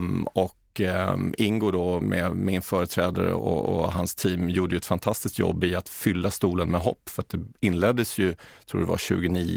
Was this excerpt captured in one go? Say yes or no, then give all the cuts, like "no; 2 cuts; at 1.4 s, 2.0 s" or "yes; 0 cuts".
no; 1 cut; at 2.0 s